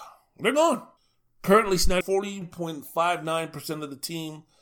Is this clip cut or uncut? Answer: cut